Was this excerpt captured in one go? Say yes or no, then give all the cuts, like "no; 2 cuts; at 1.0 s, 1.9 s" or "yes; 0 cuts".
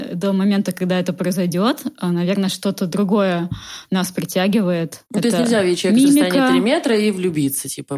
no; 1 cut; at 5.1 s